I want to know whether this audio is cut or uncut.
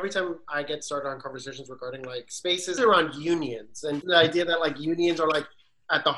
cut